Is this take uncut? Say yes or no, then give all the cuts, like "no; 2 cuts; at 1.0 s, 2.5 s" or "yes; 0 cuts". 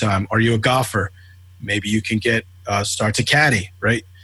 yes; 0 cuts